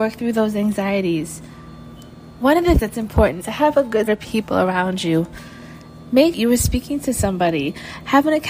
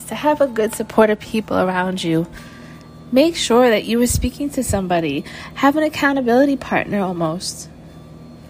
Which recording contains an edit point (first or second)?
first